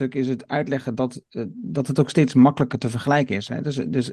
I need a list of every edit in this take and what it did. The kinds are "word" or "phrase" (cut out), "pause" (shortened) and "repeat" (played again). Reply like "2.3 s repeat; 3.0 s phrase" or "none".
none

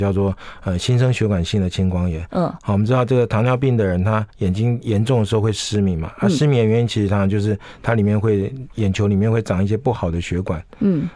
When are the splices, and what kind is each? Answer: 4.3 s pause

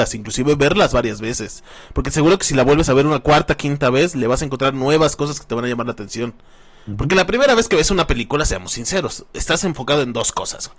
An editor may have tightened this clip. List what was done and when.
none

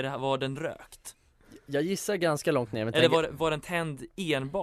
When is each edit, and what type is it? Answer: none

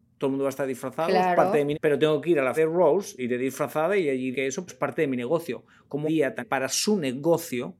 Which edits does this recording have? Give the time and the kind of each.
1.7 s word; 2.6 s word; 3.2 s word; 4.3 s word; 4.7 s word; 6.1 s word; 6.4 s word

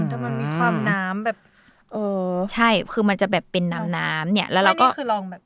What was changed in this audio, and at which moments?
none

